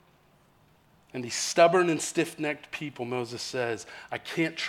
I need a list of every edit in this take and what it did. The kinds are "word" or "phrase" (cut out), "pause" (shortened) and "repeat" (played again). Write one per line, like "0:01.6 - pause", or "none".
none